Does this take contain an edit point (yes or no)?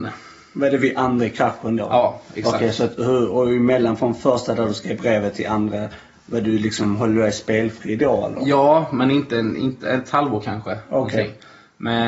no